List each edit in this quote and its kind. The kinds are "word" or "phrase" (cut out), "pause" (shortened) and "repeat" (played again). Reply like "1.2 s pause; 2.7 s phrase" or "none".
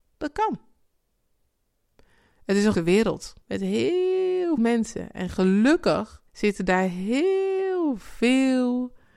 2.7 s word; 3.4 s pause; 4.6 s word; 6.3 s pause